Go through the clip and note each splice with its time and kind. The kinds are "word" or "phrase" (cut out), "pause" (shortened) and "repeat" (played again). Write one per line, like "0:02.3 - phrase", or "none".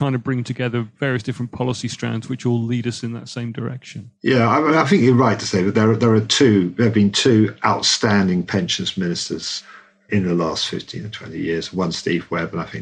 0:10.1 - word